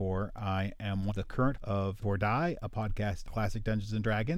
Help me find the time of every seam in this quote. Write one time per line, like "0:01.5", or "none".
0:01.1
0:01.5
0:02.0
0:03.3